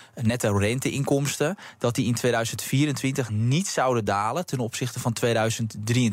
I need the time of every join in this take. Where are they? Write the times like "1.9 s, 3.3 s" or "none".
none